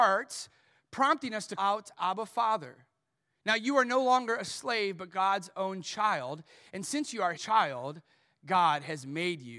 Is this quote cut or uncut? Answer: cut